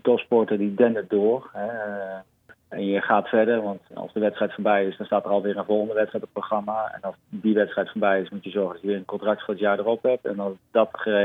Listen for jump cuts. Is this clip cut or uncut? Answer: cut